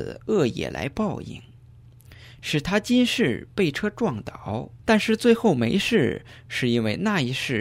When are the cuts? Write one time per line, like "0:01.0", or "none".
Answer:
0:04.8